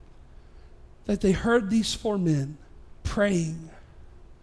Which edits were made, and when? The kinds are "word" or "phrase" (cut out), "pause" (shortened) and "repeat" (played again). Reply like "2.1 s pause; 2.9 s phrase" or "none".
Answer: 2.8 s pause